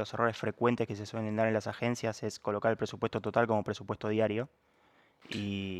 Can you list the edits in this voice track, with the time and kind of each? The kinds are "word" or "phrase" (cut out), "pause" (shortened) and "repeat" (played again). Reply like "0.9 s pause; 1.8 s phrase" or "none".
none

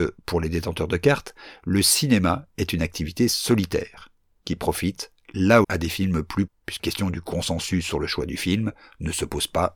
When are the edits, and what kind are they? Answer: 5.6 s word; 6.5 s word; 6.8 s word

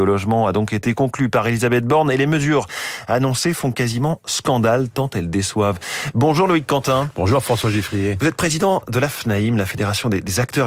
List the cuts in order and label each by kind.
none

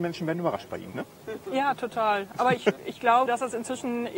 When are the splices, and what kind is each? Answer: 0.9 s word; 2.8 s word; 3.3 s word

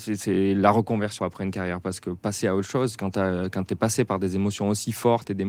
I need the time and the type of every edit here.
1.2 s phrase

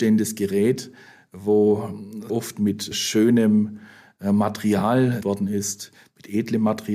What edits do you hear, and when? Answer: 2.3 s word; 5.2 s word

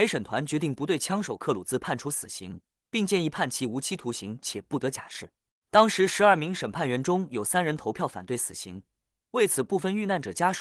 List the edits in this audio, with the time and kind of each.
none

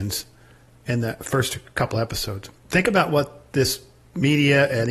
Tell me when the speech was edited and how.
2.6 s pause

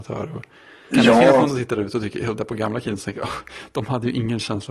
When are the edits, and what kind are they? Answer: 0.9 s word; 1.5 s word; 2.4 s word

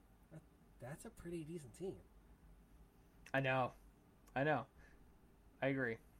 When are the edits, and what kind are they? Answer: none

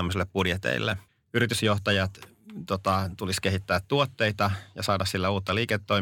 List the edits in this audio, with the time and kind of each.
1.1 s pause

